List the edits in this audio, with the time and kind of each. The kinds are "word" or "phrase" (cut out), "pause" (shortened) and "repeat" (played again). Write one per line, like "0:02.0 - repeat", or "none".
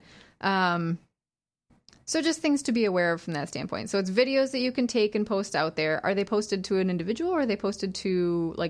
none